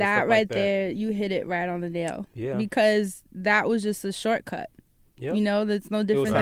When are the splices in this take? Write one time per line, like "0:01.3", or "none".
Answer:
none